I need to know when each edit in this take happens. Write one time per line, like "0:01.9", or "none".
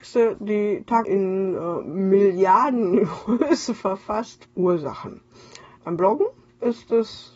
0:01.0
0:04.4